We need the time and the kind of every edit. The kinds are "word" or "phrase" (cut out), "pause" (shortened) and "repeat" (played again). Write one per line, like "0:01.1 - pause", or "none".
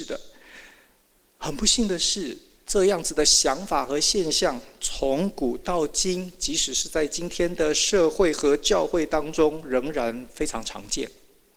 none